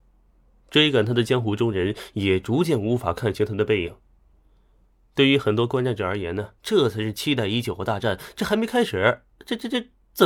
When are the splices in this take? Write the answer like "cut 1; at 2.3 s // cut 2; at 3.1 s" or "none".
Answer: cut 1; at 6.6 s